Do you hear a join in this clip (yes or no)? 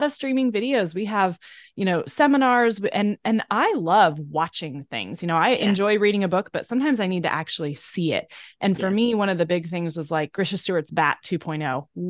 no